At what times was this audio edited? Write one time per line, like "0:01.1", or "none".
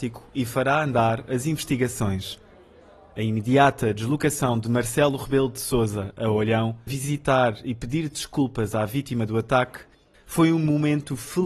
0:06.9